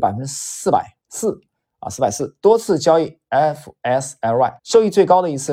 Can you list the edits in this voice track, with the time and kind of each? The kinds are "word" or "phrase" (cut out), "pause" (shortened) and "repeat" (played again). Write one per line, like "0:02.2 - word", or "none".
0:01.0 - pause
0:04.6 - pause